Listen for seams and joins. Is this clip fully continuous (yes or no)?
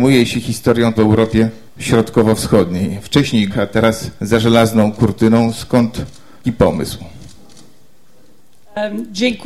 no